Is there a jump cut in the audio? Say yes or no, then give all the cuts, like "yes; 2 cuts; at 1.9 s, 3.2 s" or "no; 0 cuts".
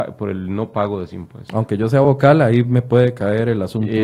no; 0 cuts